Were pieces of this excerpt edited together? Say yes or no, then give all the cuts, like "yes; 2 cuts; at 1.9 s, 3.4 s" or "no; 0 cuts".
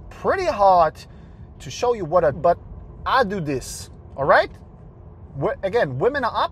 yes; 2 cuts; at 1.5 s, 2.3 s